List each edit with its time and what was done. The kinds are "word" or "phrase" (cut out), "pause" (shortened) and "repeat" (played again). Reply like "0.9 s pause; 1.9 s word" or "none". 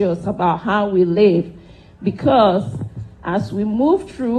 3.1 s pause